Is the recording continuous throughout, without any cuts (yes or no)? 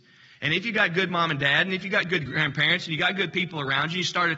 yes